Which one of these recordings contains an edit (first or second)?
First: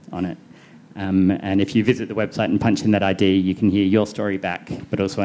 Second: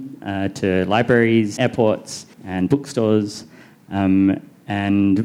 second